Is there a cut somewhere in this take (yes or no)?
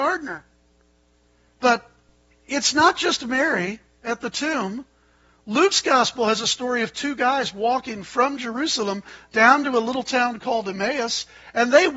no